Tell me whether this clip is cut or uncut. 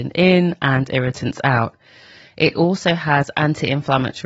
uncut